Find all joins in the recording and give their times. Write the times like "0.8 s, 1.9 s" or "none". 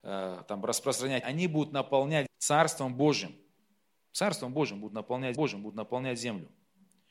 1.2 s, 2.3 s, 3.6 s, 5.4 s